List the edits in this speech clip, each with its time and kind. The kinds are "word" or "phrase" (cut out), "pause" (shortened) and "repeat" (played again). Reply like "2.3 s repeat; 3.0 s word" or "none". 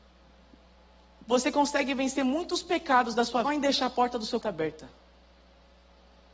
3.4 s phrase; 4.4 s word